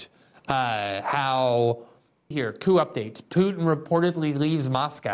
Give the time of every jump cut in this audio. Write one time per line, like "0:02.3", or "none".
0:02.3